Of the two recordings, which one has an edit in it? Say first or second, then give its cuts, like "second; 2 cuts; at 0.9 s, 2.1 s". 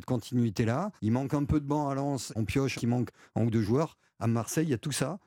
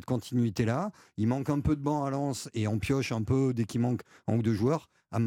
first; 3 cuts; at 1.0 s, 2.4 s, 2.8 s